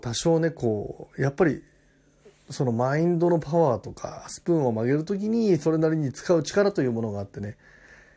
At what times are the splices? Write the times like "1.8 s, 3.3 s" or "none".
none